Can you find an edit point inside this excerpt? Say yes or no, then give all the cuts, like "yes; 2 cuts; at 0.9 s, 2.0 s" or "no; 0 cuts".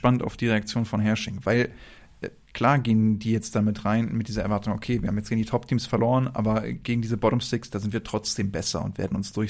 no; 0 cuts